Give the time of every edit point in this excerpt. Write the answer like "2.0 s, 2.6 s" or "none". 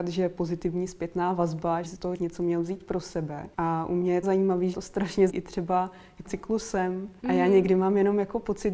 1.9 s, 2.2 s, 3.5 s, 4.2 s, 4.7 s, 5.3 s, 6.2 s, 7.2 s